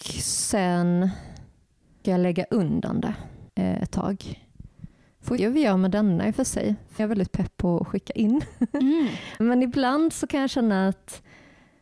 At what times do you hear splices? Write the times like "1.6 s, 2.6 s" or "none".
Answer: 2.0 s, 3.5 s, 5.4 s, 7.0 s, 9.4 s